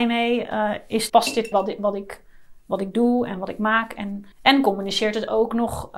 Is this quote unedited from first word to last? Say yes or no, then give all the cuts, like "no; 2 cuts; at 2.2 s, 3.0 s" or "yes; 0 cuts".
no; 3 cuts; at 1.1 s, 1.5 s, 4.3 s